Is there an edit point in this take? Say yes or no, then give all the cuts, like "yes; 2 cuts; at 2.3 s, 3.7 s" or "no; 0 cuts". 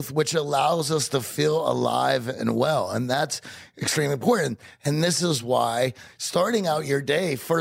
no; 0 cuts